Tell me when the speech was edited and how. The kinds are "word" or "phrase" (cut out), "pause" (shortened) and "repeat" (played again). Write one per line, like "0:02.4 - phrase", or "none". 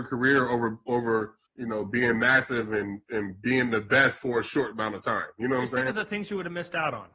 0:01.5 - pause